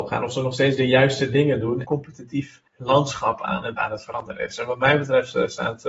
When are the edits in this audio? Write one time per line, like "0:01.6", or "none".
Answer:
0:01.8
0:02.7
0:03.8